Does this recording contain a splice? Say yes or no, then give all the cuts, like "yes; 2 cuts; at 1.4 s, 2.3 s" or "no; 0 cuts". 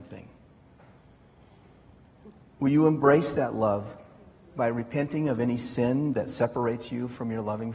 no; 0 cuts